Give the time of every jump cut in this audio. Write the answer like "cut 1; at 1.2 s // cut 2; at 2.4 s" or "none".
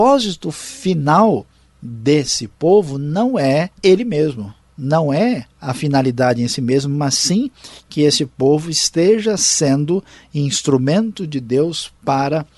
cut 1; at 3.7 s